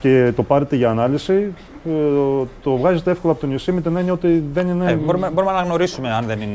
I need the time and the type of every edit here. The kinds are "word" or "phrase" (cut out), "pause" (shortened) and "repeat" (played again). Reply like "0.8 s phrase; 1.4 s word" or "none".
none